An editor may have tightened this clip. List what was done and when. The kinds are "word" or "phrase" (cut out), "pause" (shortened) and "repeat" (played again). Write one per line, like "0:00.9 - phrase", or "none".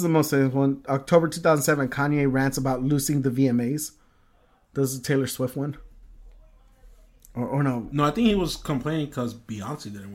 none